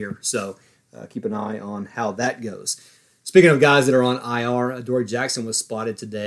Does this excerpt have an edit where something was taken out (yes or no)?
no